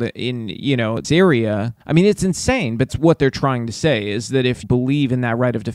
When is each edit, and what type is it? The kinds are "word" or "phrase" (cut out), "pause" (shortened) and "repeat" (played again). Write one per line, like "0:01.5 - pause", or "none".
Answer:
0:01.0 - word
0:01.8 - pause
0:02.9 - phrase
0:04.6 - word

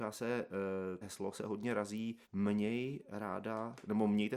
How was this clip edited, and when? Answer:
0:01.0 - word
0:02.2 - pause

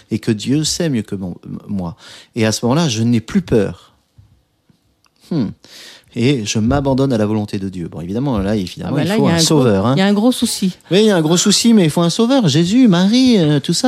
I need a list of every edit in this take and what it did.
none

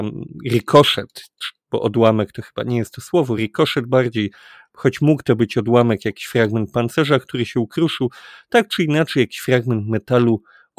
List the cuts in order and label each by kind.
none

